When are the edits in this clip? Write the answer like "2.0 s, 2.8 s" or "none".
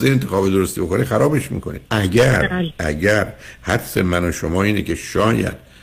1.9 s

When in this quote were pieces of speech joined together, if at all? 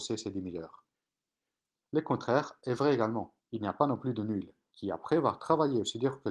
none

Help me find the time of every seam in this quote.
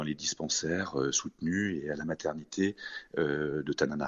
none

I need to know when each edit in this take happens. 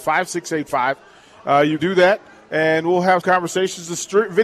1.8 s, 3.2 s

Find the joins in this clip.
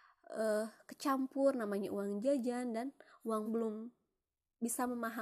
3.5 s

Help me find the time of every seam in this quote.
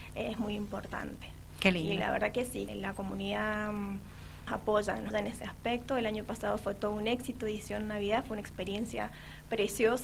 2.7 s, 4.5 s, 5.1 s

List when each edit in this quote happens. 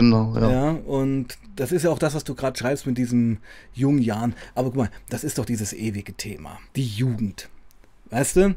6.7 s

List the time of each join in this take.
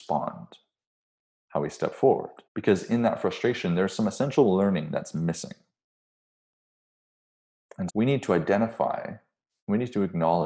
2.5 s, 7.9 s

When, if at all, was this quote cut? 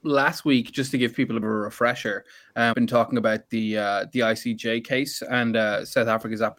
1.4 s, 2.7 s

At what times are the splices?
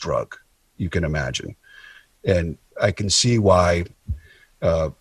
none

